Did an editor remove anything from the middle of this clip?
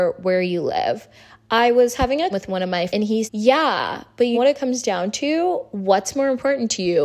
yes; 4 cuts; at 2.3 s, 2.9 s, 3.3 s, 4.3 s

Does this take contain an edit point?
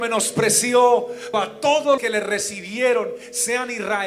yes; 2 cuts; at 1.3 s, 2.0 s

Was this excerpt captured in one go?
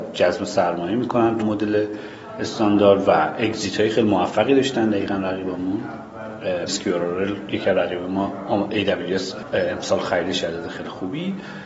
no; 2 cuts; at 1.4 s, 6.7 s

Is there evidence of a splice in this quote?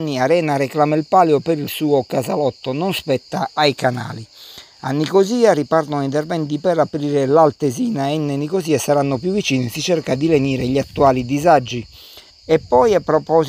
yes; 1 cut; at 12.3 s

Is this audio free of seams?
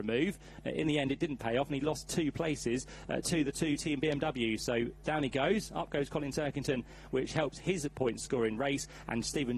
yes; 0 cuts

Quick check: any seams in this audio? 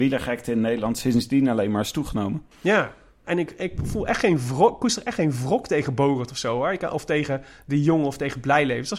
no; 0 cuts

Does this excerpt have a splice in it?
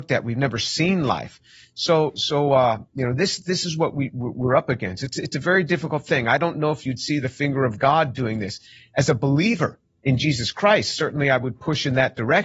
no; 0 cuts

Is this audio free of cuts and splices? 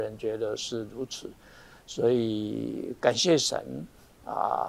yes; 0 cuts

